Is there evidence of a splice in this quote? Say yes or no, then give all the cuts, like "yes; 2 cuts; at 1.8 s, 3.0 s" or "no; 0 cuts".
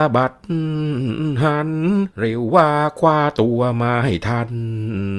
yes; 1 cut; at 2.1 s